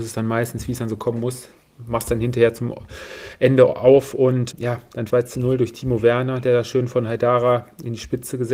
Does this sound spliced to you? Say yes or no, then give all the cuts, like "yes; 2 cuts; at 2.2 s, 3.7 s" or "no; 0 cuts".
yes; 2 cuts; at 4.5 s, 5.1 s